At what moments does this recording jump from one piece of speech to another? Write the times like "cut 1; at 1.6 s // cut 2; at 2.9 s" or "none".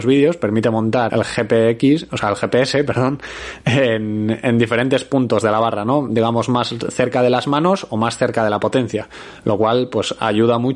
cut 1; at 1.1 s